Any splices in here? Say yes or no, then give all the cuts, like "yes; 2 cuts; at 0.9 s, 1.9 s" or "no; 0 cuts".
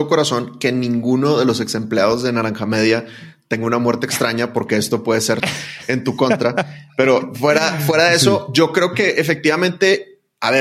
yes; 1 cut; at 5.4 s